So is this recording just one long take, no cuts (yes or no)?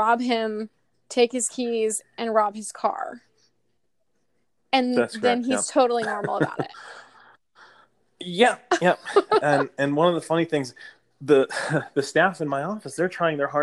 yes